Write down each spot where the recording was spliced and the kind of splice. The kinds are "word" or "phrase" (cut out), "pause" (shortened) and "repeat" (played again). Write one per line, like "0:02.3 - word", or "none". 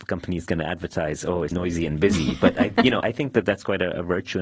0:01.5 - word
0:03.0 - word